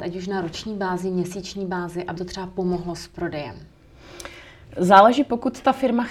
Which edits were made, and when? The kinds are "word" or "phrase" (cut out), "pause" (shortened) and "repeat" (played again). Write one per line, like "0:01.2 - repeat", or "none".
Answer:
0:02.2 - word